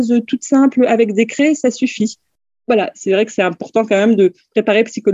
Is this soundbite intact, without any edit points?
yes; 0 cuts

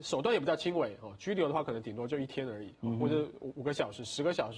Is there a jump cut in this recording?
no; 0 cuts

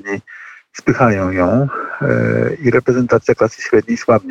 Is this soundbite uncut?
yes; 0 cuts

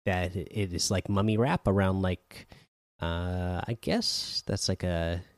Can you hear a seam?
no; 0 cuts

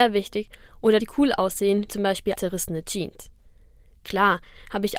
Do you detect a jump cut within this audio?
yes; 3 cuts; at 1.0 s, 1.9 s, 2.4 s

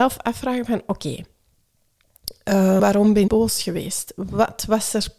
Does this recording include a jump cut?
yes; 2 cuts; at 2.8 s, 3.3 s

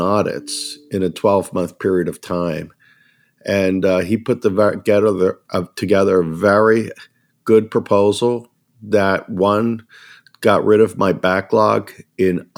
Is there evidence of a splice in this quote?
no; 0 cuts

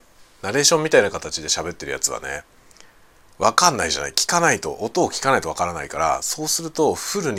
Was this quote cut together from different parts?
no; 0 cuts

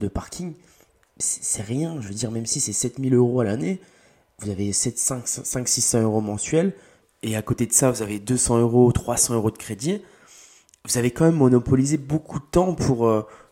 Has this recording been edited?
no; 0 cuts

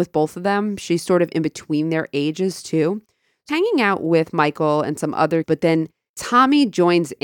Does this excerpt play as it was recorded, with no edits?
no; 2 cuts; at 3.5 s, 5.4 s

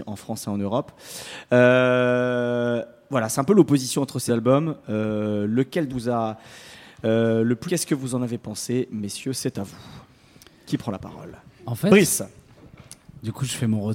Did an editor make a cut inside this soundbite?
yes; 3 cuts; at 4.3 s, 5.9 s, 7.7 s

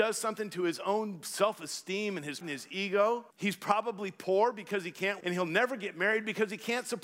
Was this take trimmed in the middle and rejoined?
yes; 3 cuts; at 2.4 s, 3.3 s, 5.2 s

